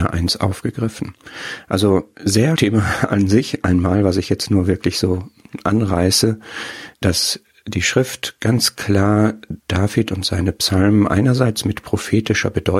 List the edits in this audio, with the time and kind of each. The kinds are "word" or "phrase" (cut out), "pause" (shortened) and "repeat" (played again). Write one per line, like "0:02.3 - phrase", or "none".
0:02.6 - phrase
0:06.9 - pause
0:09.6 - pause